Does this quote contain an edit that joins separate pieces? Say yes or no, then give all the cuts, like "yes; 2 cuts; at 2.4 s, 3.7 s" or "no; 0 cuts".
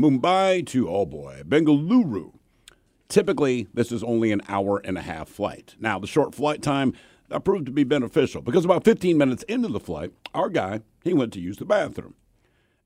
no; 0 cuts